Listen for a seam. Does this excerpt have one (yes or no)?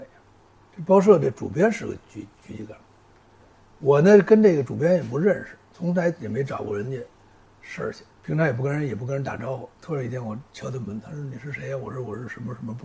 yes